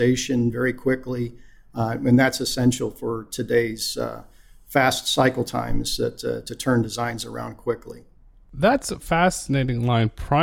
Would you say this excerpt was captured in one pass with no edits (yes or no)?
yes